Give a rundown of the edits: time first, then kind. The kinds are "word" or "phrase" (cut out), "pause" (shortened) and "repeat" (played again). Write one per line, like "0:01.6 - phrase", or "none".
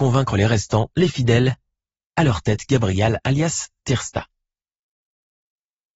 none